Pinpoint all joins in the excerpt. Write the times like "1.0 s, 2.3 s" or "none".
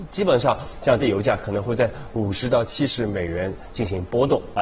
1.0 s